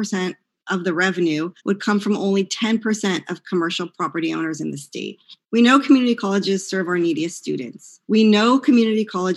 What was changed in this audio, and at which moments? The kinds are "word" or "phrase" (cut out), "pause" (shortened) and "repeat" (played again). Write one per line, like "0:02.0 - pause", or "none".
0:01.6 - pause
0:05.4 - pause
0:08.0 - pause